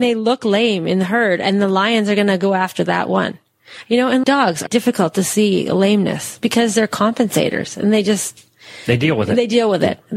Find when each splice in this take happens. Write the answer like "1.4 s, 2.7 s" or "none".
4.2 s, 4.7 s